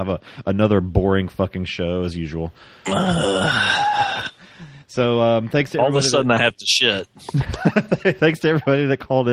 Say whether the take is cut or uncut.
cut